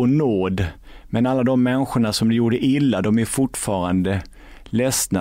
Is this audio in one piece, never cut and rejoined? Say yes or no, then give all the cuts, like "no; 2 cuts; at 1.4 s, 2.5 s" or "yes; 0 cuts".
yes; 0 cuts